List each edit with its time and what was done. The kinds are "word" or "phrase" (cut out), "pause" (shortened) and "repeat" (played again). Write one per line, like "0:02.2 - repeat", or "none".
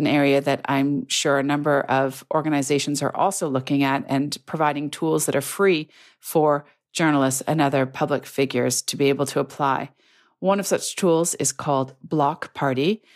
none